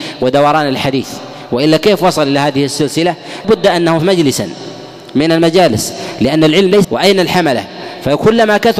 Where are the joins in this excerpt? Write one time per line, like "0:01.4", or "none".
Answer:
0:03.4
0:04.0
0:06.8